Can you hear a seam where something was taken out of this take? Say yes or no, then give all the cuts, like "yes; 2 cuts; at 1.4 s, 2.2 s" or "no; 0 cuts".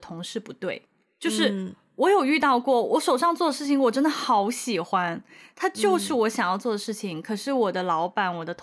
no; 0 cuts